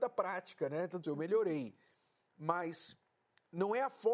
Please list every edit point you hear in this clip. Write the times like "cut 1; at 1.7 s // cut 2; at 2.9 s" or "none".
cut 1; at 1.0 s